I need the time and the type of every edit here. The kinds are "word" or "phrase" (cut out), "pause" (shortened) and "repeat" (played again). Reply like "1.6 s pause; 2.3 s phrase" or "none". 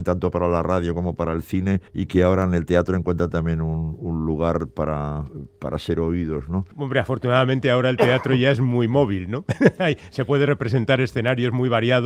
1.9 s pause; 6.7 s pause